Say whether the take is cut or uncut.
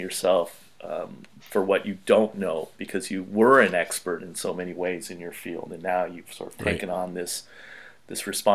cut